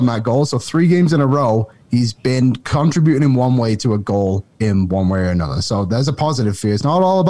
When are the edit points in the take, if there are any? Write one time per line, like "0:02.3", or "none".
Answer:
0:04.5